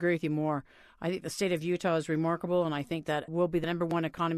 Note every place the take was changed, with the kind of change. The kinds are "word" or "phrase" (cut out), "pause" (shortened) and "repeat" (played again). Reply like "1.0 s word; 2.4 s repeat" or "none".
3.3 s word